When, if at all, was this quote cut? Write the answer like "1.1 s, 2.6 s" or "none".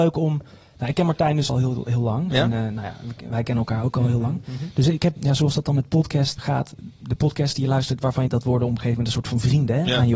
1.5 s, 5.2 s, 6.4 s, 8.3 s